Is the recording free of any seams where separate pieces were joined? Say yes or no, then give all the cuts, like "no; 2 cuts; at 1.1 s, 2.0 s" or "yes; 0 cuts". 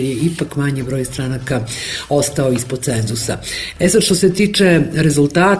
yes; 0 cuts